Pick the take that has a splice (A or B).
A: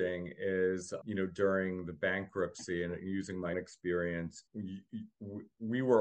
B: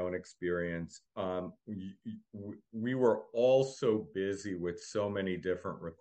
A